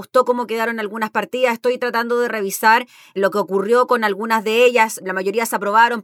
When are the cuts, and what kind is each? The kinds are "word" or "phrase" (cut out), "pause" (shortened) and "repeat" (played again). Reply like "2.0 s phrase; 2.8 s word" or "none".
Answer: none

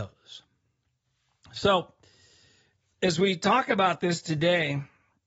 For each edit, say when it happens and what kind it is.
none

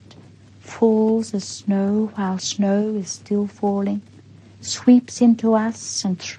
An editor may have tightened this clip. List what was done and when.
none

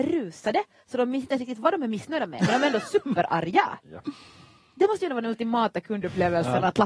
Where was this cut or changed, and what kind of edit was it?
none

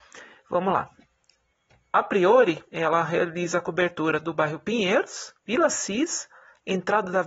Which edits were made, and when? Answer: 2.7 s pause; 5.4 s pause

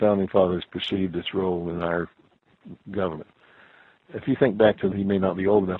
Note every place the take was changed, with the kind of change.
2.8 s pause; 4.9 s word

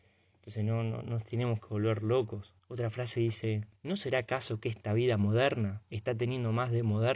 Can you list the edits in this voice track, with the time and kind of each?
2.6 s pause; 3.8 s pause

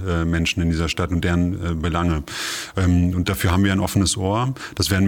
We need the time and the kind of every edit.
none

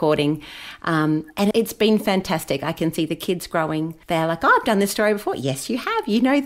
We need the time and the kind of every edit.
1.5 s word; 4.0 s pause

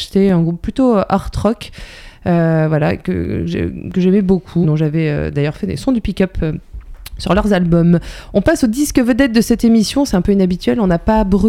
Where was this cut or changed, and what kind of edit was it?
4.6 s word

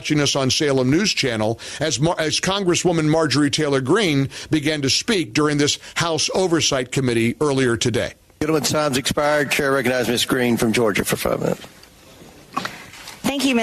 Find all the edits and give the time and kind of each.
8.2 s pause

